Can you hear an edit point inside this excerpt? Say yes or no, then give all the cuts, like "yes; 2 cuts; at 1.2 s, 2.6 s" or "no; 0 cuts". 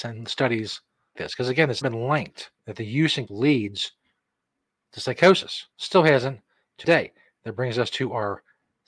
yes; 6 cuts; at 1.2 s, 1.8 s, 2.6 s, 3.3 s, 5.7 s, 6.8 s